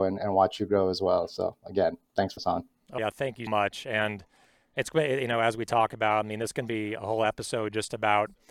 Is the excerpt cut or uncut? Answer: cut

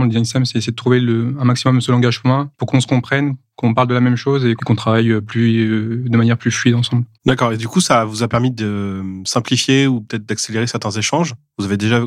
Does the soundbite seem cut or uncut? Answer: cut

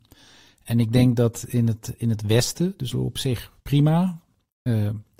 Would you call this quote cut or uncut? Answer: cut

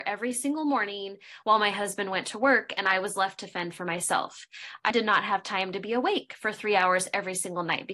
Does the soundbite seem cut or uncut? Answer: cut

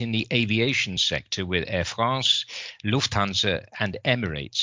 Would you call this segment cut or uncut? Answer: uncut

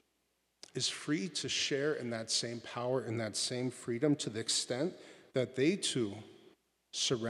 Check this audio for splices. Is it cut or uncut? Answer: uncut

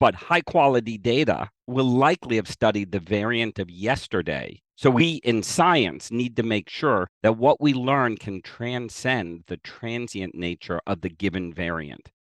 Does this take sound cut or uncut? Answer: cut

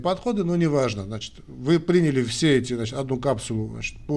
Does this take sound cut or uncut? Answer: uncut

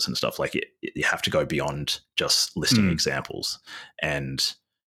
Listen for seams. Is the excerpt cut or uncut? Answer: uncut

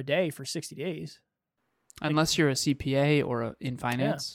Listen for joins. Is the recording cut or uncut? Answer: uncut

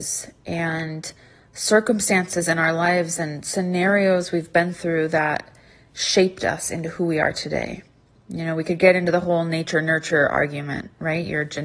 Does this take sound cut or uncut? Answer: uncut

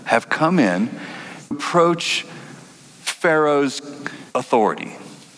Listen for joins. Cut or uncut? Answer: cut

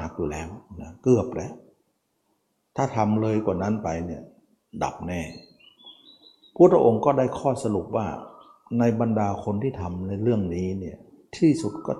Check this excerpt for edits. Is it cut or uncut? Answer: uncut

